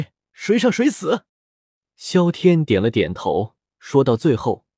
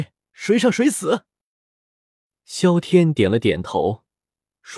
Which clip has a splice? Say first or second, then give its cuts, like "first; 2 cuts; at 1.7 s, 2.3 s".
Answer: first; 2 cuts; at 1.3 s, 3.7 s